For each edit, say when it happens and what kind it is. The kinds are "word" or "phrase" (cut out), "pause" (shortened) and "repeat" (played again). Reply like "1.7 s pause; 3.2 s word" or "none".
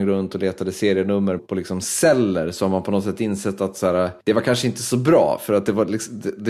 1.4 s word; 4.2 s pause